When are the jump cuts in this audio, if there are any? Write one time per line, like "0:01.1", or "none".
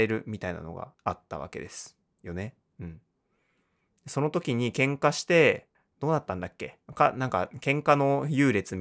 0:00.9
0:05.7
0:06.8

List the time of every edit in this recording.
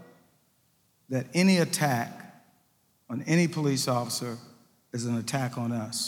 none

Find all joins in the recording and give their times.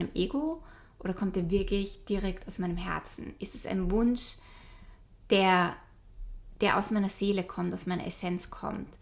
none

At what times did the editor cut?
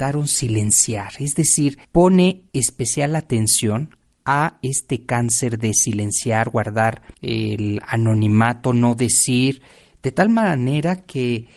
none

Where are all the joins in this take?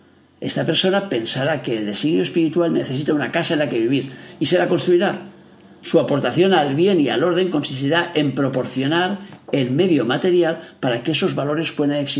none

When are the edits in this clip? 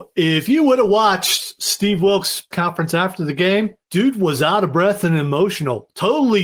0:02.5
0:03.8

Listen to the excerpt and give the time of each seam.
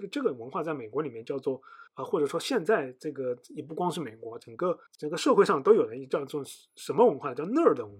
0:01.9
0:04.9

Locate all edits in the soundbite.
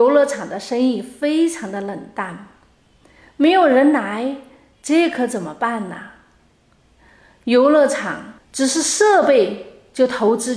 none

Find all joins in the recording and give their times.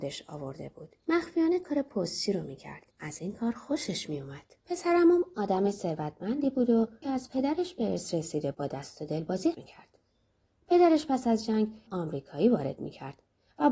0:01.0
0:02.9
0:04.6
0:07.0
0:08.5
0:09.5
0:11.9

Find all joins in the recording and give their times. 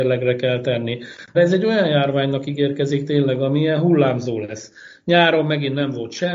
0:01.3

